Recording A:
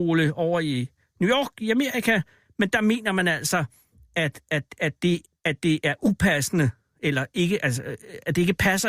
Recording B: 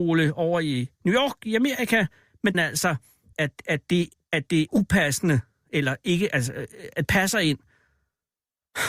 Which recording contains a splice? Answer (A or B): B